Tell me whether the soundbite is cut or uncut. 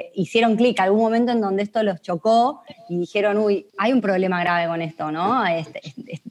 cut